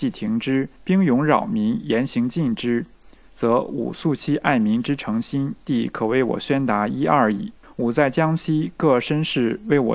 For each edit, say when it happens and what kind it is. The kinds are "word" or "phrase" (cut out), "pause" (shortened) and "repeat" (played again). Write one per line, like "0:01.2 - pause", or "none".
none